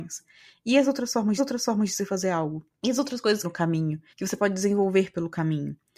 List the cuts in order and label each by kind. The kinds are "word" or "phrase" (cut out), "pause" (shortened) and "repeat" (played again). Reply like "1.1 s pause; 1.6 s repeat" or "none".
1.4 s repeat; 2.7 s pause; 3.4 s phrase; 4.1 s pause

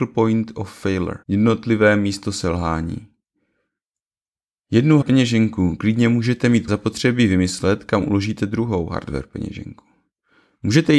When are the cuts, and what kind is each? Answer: 1.2 s pause; 5.0 s word; 6.7 s phrase

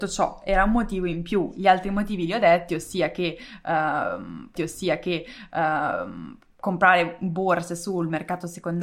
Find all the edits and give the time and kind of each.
4.6 s repeat

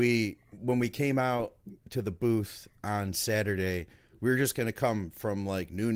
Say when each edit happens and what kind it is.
none

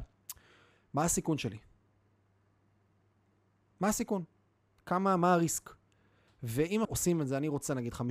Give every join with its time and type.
6.8 s word

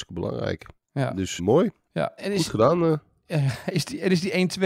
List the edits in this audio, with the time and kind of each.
1.4 s word; 2.2 s word

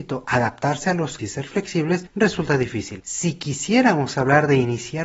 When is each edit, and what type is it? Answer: 1.2 s word

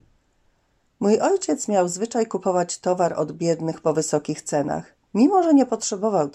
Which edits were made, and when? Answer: 5.0 s pause

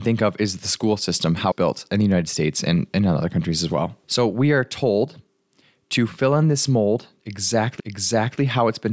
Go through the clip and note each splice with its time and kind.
1.5 s word; 4.0 s pause; 7.8 s repeat

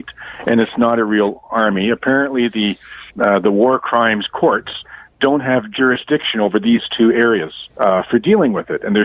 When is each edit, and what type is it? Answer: 3.1 s pause; 7.7 s pause

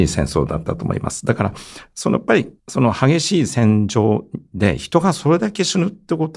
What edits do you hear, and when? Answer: 2.6 s pause

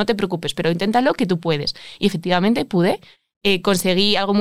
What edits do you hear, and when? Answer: none

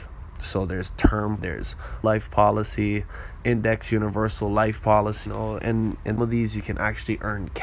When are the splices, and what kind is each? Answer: 1.4 s word; 2.0 s word; 3.4 s word; 5.3 s word; 5.6 s word; 6.2 s word

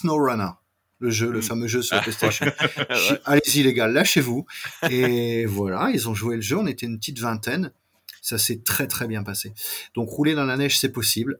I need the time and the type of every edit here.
none

